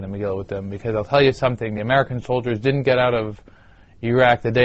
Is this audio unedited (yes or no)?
yes